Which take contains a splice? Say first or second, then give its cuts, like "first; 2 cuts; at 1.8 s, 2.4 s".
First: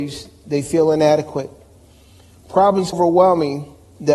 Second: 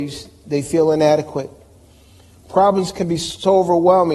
first; 1 cut; at 2.9 s